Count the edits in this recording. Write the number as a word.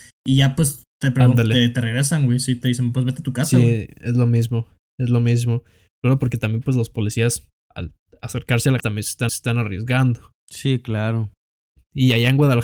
three